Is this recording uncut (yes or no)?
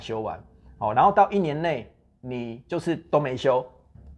yes